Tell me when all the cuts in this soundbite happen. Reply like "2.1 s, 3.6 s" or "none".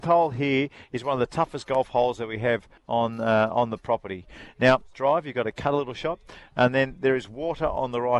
2.8 s, 4.9 s